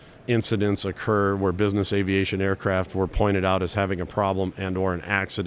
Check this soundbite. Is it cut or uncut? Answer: uncut